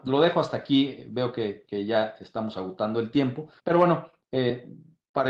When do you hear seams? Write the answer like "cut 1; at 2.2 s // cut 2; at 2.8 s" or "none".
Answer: cut 1; at 3.6 s